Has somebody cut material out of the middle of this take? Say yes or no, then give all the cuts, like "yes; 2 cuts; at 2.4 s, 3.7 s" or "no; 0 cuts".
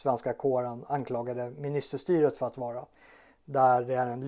no; 0 cuts